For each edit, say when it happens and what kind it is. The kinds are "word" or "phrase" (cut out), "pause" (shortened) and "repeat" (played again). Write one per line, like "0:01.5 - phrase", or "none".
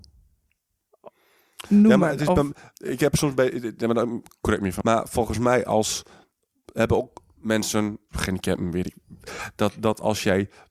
0:04.8 - word
0:08.1 - word